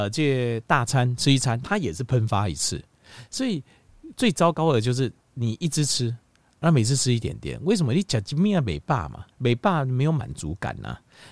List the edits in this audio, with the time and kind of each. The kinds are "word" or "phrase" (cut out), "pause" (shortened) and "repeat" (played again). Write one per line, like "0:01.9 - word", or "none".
0:05.2 - pause
0:09.3 - pause